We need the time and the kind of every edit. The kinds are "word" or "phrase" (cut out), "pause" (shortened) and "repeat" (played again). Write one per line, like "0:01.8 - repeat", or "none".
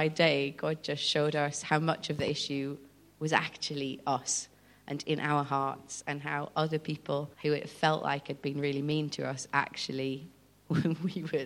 0:07.3 - pause